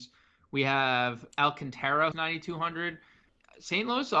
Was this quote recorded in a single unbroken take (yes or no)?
no